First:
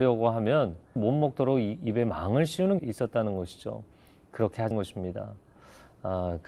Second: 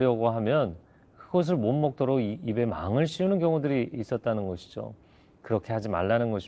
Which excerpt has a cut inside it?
first; 3 cuts; at 1.0 s, 2.8 s, 4.7 s

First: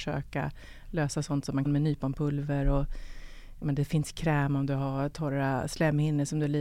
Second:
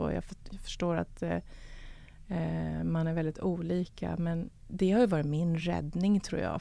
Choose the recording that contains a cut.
first; 1 cut; at 1.6 s

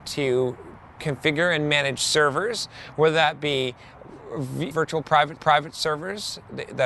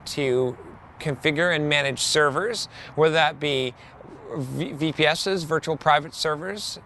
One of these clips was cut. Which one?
first; 2 cuts; at 4.7 s, 5.4 s

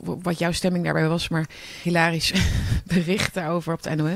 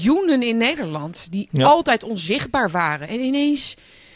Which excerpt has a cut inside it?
first; 1 cut; at 1.8 s

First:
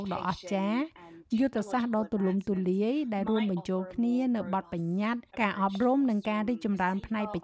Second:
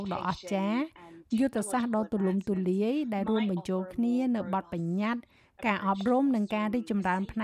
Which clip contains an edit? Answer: first; 1 cut; at 5.3 s

